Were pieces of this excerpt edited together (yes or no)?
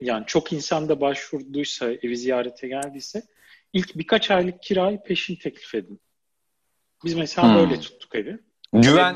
no